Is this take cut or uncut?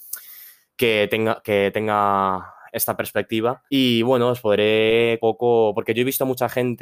cut